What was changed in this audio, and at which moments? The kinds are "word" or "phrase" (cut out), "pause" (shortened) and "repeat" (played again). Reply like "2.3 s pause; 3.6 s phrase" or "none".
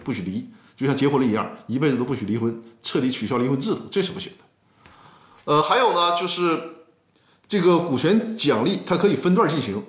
none